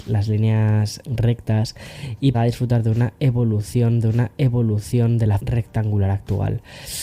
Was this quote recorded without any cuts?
no; 4 cuts; at 1.0 s, 2.3 s, 4.0 s, 5.4 s

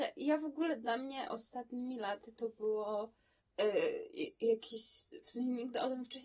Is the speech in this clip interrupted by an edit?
yes; 1 cut; at 3.4 s

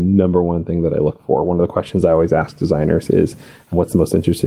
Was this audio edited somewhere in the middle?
no; 0 cuts

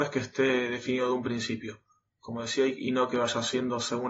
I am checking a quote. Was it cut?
no; 0 cuts

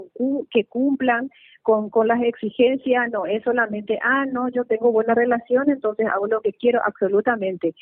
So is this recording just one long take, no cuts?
yes; 0 cuts

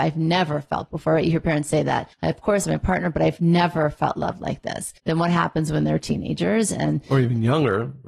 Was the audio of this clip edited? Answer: yes; 3 cuts; at 2.1 s, 2.6 s, 5.0 s

